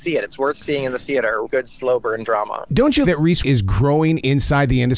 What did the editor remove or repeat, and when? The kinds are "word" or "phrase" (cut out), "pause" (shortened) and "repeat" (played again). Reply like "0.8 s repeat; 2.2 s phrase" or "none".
1.4 s word; 3.0 s phrase; 3.4 s word